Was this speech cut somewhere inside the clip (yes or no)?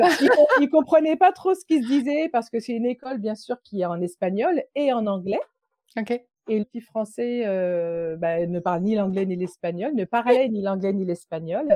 yes